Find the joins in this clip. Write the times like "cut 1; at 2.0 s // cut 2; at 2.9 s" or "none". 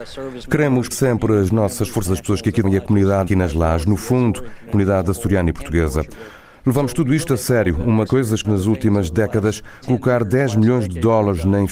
cut 1; at 0.9 s // cut 2; at 2.1 s // cut 3; at 2.6 s // cut 4; at 3.3 s // cut 5; at 4.7 s // cut 6; at 7.3 s // cut 7; at 8.1 s // cut 8; at 8.4 s // cut 9; at 9.8 s